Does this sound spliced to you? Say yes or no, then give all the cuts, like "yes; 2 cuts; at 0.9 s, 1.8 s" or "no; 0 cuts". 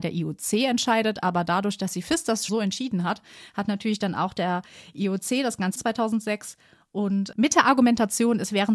yes; 3 cuts; at 2.5 s, 5.8 s, 7.3 s